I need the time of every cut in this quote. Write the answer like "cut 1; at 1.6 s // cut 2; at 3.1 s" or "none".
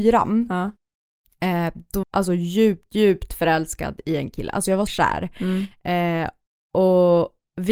cut 1; at 2.0 s // cut 2; at 4.9 s